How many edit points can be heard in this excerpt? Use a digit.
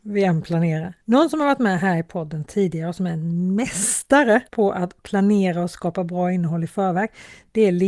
2